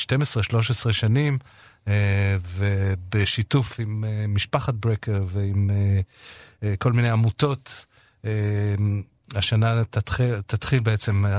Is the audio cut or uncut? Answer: uncut